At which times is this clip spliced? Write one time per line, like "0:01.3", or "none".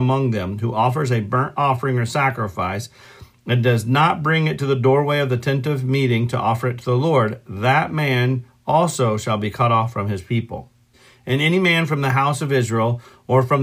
0:10.9